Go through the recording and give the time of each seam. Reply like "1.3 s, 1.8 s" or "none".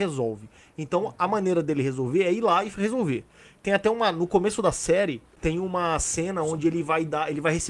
none